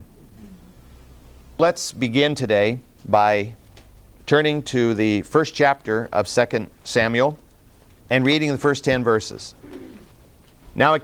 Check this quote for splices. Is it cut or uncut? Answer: uncut